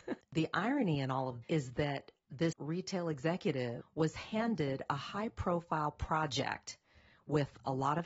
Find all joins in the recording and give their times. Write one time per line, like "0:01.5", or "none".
0:01.4
0:02.5